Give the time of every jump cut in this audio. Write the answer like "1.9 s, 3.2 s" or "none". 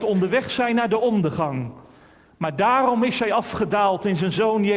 none